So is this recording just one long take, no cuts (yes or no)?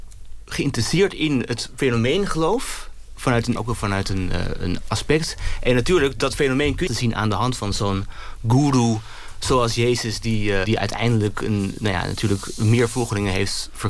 no